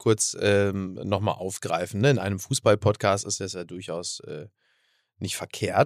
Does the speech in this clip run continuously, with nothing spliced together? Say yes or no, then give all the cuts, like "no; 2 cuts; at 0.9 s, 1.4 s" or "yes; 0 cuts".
yes; 0 cuts